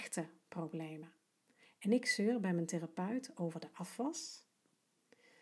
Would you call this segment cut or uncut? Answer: uncut